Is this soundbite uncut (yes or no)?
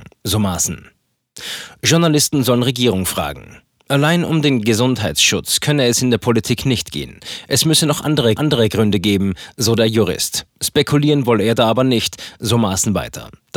no